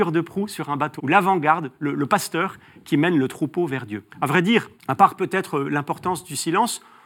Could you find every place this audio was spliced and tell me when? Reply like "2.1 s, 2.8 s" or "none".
1.0 s, 4.1 s, 4.8 s